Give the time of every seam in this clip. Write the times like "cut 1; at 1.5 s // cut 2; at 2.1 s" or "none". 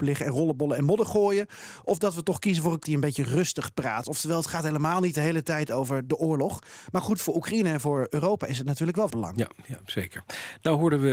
cut 1; at 2.8 s // cut 2; at 9.1 s